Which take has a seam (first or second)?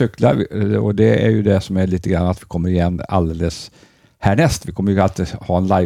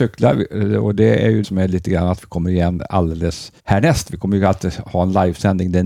second